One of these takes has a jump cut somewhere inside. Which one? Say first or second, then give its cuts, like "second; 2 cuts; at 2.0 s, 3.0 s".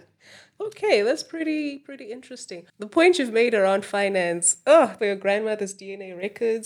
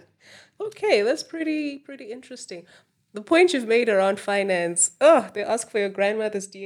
first; 2 cuts; at 2.7 s, 5.0 s